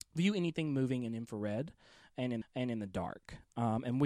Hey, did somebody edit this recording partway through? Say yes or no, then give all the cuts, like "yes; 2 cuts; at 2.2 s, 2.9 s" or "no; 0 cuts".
yes; 1 cut; at 2.4 s